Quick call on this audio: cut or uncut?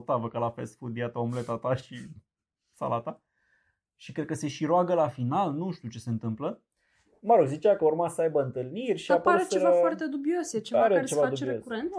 uncut